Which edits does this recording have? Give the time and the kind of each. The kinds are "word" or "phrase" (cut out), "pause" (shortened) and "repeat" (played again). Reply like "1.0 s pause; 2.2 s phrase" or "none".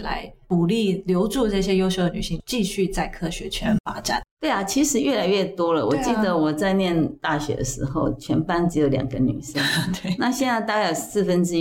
4.3 s pause